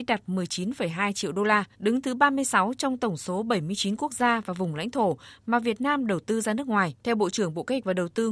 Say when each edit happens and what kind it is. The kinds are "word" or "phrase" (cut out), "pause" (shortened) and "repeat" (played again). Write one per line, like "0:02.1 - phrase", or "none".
0:01.7 - pause
0:07.0 - pause